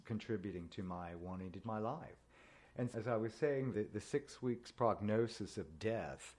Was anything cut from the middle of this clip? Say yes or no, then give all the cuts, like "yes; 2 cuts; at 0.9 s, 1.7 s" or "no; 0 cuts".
yes; 3 cuts; at 1.6 s, 2.9 s, 3.7 s